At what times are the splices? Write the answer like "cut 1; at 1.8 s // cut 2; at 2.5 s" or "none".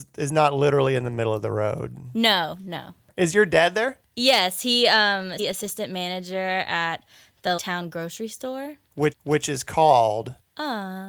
cut 1; at 4.1 s // cut 2; at 5.4 s // cut 3; at 7.6 s // cut 4; at 9.1 s